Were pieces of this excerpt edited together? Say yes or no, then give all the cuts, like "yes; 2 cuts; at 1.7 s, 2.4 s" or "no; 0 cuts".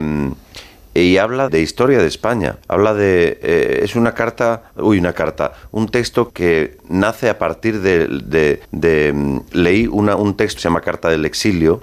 yes; 5 cuts; at 1.5 s, 2.6 s, 6.3 s, 8.6 s, 10.6 s